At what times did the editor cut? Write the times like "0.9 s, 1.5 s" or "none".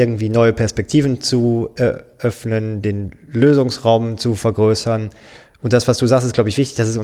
none